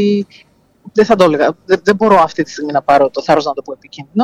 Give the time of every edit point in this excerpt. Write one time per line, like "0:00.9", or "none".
none